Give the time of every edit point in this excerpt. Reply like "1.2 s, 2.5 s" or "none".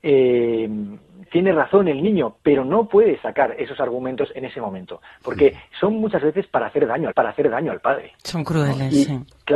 1.3 s, 7.1 s, 8.2 s

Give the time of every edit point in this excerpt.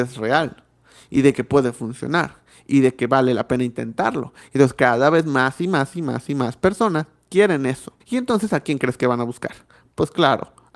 8.0 s

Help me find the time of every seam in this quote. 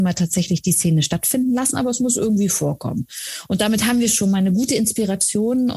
none

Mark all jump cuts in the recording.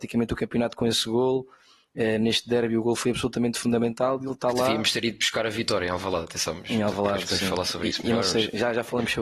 none

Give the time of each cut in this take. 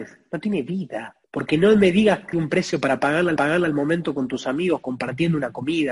1.2 s, 2.3 s, 3.4 s

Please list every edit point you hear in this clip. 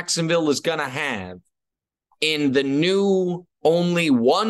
none

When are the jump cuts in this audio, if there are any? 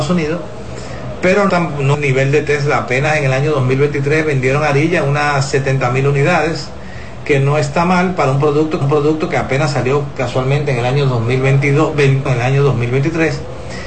1.5 s, 1.9 s, 8.8 s, 12.3 s

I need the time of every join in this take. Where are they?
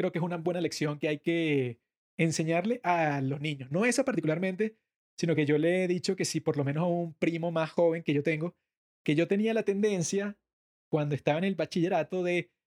none

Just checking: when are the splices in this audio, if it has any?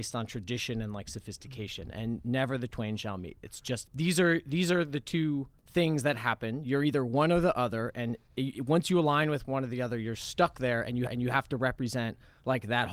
3.9 s, 5.6 s, 8.3 s, 11.1 s

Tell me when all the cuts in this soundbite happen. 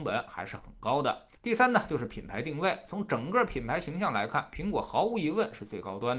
1.3 s

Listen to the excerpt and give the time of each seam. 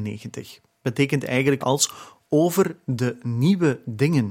1.6 s

